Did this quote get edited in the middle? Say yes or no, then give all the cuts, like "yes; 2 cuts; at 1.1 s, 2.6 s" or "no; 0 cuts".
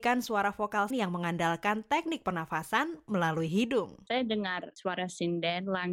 yes; 1 cut; at 0.9 s